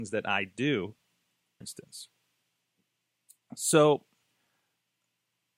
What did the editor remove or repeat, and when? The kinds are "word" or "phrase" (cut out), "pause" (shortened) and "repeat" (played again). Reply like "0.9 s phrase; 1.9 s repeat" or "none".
1.6 s word